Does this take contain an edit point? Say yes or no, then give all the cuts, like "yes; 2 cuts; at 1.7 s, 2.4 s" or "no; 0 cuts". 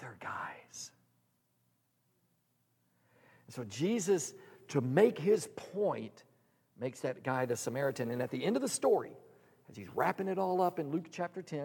no; 0 cuts